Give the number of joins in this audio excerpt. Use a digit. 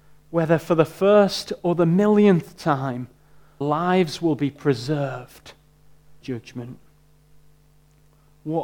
2